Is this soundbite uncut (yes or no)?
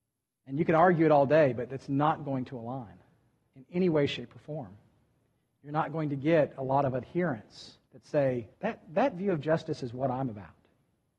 no